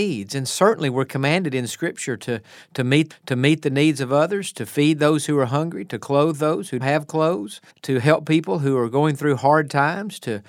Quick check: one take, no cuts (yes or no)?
no